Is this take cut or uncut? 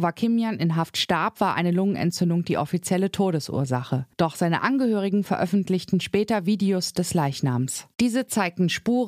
cut